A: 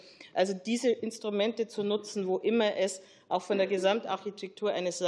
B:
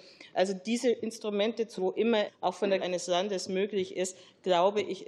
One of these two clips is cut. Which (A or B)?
B